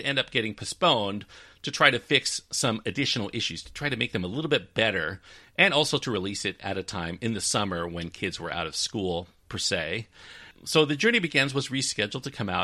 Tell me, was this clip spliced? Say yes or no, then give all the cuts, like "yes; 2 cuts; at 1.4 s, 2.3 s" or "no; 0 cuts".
no; 0 cuts